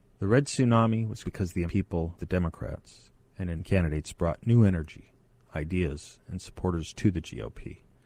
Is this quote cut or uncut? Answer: cut